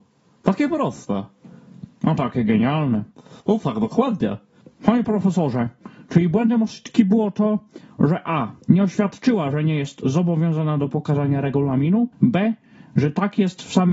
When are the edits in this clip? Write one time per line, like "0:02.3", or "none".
0:03.4
0:08.6
0:12.1